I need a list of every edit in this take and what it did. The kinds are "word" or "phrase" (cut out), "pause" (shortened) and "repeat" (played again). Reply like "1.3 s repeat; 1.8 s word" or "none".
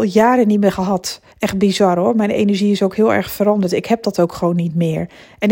1.3 s pause